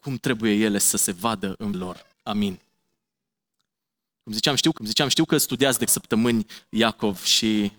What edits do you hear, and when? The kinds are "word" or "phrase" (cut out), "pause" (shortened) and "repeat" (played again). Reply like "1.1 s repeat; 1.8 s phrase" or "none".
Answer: 0.9 s word; 1.7 s word; 2.1 s pause; 4.8 s repeat; 5.9 s word